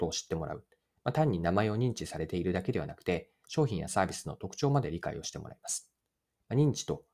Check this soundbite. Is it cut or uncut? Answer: uncut